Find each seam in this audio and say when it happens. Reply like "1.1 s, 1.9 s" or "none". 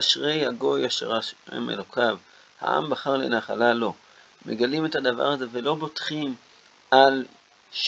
none